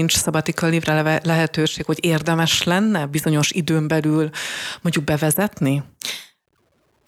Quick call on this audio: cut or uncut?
uncut